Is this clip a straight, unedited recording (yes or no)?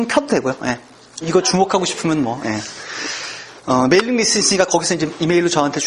no